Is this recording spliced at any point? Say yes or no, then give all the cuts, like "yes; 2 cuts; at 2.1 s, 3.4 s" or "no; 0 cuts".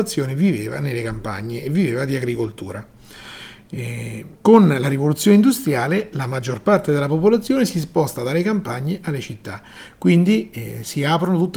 yes; 1 cut; at 4.4 s